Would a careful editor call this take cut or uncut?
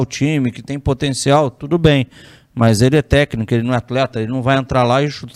uncut